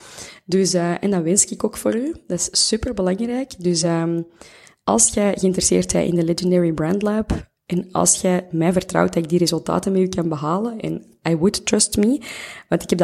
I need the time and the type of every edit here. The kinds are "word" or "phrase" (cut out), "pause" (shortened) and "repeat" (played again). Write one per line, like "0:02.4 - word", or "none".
none